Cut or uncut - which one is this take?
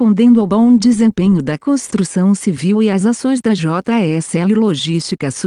uncut